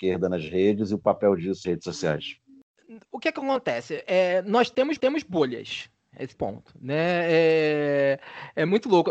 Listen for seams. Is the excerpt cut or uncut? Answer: cut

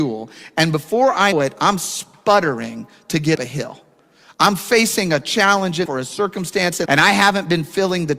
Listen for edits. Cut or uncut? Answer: cut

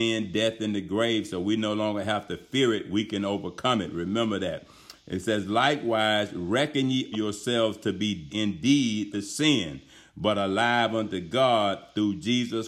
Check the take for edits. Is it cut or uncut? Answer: cut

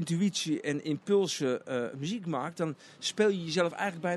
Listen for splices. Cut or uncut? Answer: uncut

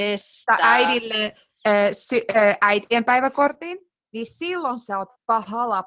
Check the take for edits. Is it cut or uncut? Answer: uncut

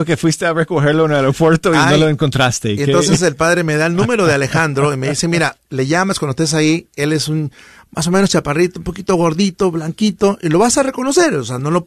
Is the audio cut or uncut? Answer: uncut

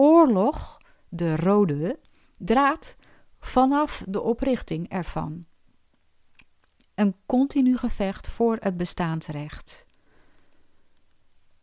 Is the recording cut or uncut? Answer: uncut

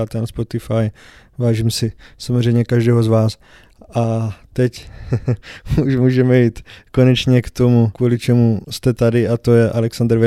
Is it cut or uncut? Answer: uncut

